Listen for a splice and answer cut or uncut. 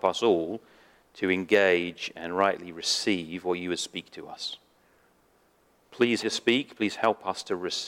cut